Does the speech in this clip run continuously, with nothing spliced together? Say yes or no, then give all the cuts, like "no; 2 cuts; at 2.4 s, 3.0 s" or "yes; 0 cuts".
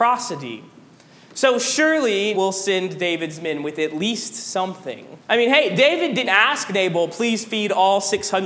no; 3 cuts; at 2.3 s, 5.2 s, 6.3 s